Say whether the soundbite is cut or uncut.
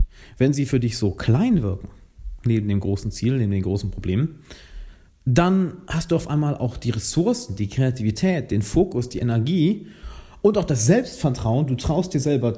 cut